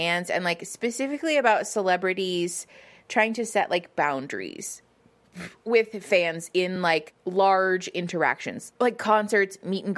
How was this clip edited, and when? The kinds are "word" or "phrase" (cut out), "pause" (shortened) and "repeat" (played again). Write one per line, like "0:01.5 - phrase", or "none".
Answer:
none